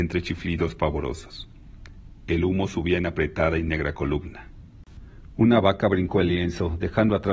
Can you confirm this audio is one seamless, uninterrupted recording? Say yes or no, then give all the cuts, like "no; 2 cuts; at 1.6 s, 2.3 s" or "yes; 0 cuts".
yes; 0 cuts